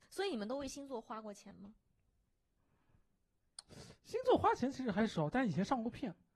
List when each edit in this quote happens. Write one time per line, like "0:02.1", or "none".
none